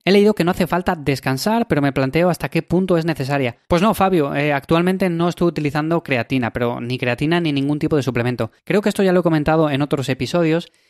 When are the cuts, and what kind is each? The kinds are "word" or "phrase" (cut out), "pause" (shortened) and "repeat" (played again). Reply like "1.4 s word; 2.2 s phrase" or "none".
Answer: 3.6 s pause; 8.6 s pause